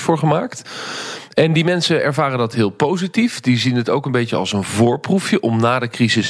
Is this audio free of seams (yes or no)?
yes